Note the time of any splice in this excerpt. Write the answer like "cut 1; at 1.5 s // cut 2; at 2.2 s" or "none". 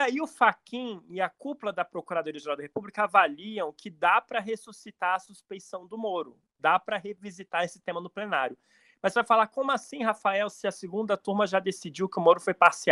none